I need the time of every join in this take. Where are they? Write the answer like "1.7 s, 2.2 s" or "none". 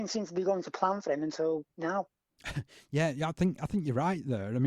none